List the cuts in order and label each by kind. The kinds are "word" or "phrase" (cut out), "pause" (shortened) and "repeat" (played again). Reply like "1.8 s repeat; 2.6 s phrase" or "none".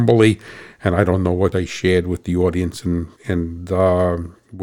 1.5 s word; 3.2 s pause